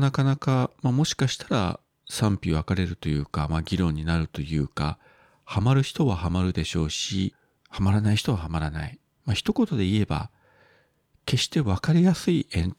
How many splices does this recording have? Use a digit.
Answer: 0